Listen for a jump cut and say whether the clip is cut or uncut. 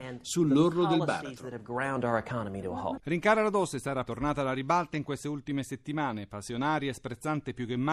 cut